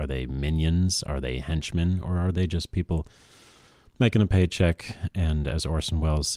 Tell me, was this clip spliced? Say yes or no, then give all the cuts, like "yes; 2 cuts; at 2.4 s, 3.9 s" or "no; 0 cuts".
no; 0 cuts